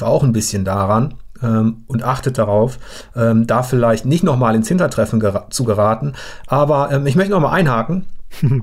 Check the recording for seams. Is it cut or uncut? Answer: uncut